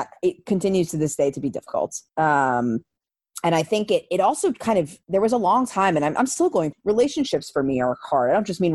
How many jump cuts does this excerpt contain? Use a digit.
2